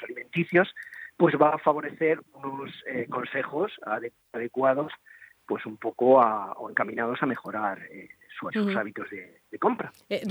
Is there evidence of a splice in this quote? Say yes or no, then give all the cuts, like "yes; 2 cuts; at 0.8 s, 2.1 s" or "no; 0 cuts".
yes; 1 cut; at 8.5 s